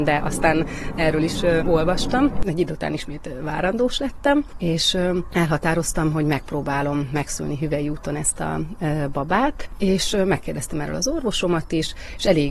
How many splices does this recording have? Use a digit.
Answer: 1